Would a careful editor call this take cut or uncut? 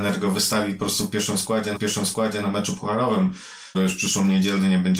cut